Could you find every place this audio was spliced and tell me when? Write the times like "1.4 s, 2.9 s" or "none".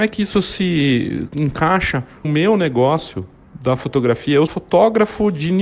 1.3 s, 2.2 s, 4.5 s